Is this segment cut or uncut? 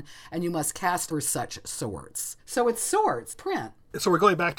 cut